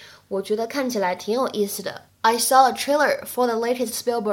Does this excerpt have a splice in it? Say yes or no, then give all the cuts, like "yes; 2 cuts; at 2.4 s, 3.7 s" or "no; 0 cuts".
yes; 1 cut; at 2.1 s